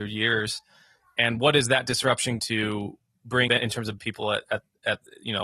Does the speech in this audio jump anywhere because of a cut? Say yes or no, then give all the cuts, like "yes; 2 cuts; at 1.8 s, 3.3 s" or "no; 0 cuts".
yes; 3 cuts; at 2.4 s, 3.5 s, 4.0 s